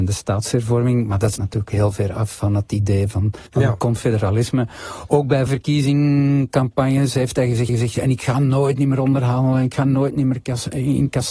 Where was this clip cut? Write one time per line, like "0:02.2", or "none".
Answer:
0:01.4
0:03.5
0:05.5
0:07.7